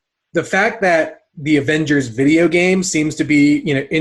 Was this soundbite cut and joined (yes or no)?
no